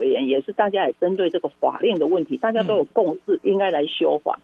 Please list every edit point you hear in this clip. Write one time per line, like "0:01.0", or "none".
0:03.4